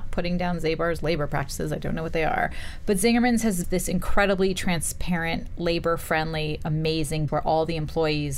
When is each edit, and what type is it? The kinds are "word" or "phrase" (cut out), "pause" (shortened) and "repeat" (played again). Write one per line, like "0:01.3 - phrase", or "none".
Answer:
0:03.6 - word
0:07.3 - word